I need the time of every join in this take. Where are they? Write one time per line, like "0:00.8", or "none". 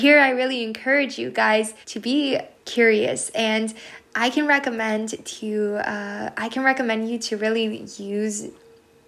0:01.8
0:02.6